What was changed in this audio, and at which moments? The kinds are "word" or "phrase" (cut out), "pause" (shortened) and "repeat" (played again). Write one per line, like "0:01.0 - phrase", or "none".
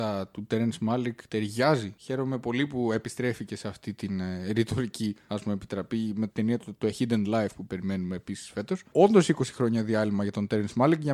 none